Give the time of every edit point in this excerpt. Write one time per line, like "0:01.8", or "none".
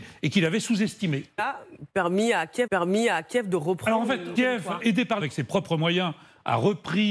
0:01.4
0:02.7
0:04.4
0:04.8
0:05.2